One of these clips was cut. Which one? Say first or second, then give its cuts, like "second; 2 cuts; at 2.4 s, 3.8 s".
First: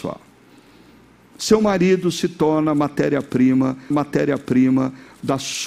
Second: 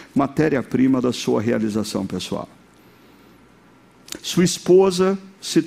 first; 1 cut; at 3.9 s